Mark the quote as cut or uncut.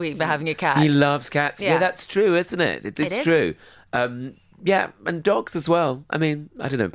uncut